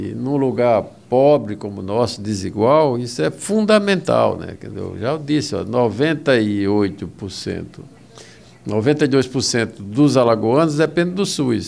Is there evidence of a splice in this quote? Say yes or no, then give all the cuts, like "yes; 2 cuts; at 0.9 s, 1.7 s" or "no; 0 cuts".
no; 0 cuts